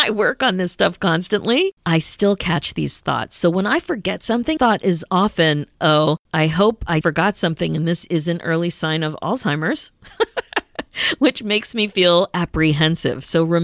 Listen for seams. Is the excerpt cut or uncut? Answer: cut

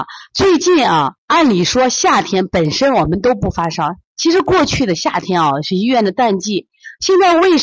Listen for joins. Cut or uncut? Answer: cut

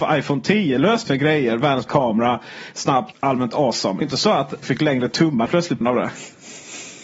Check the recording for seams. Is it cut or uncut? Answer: cut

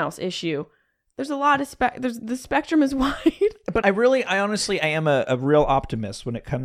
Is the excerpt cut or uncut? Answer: cut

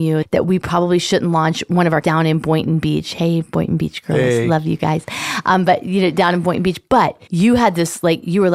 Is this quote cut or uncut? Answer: cut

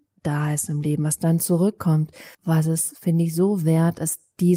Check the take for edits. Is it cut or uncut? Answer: cut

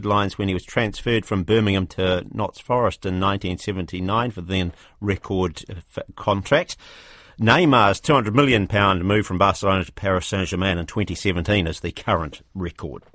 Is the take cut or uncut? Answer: uncut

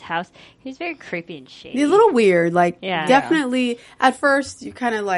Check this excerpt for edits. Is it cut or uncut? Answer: uncut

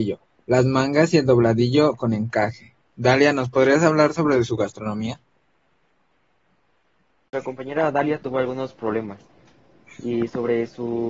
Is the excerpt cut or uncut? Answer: uncut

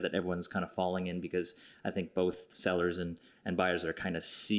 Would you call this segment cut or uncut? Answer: uncut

